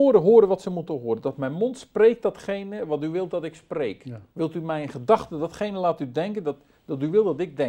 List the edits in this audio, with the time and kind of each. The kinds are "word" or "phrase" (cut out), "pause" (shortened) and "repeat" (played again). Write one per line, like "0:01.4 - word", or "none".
0:04.3 - pause